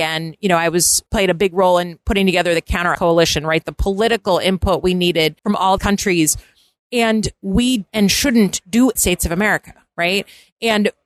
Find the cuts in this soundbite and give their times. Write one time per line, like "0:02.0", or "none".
0:01.1
0:02.9
0:05.4
0:05.8
0:07.9
0:09.0